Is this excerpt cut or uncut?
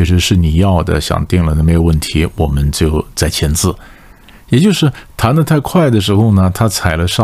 uncut